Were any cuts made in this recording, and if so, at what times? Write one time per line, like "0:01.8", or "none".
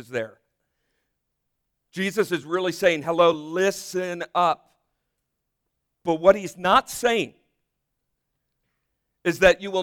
none